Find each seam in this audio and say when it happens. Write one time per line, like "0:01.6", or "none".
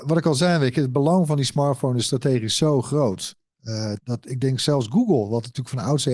0:04.0